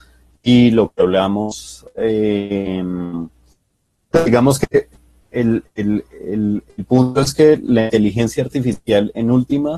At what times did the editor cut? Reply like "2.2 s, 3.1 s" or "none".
none

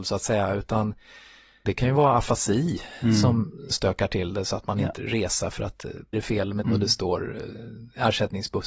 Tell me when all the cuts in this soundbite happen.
1.7 s, 3.7 s, 5.0 s, 6.1 s, 6.6 s

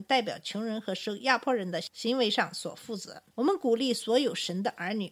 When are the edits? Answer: 3.3 s

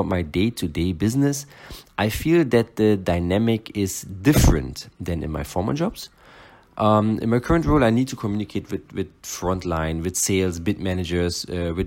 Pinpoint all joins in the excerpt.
none

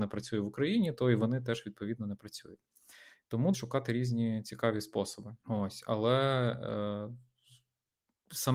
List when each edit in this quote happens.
3.5 s, 5.4 s

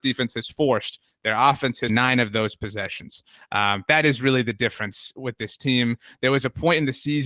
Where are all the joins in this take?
1.9 s

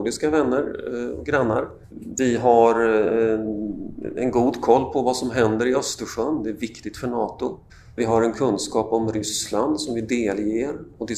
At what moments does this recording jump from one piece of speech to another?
1.8 s, 7.7 s, 8.3 s

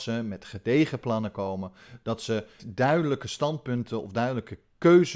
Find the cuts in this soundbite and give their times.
2.6 s

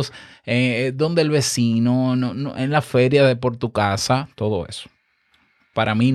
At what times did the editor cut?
none

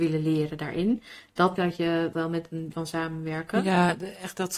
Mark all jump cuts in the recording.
1.6 s, 2.1 s, 2.7 s

